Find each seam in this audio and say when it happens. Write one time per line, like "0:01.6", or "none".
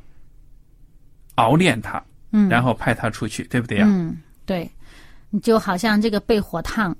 0:05.2